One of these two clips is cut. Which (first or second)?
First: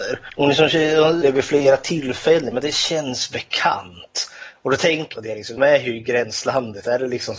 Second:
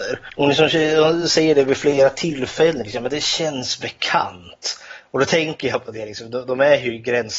first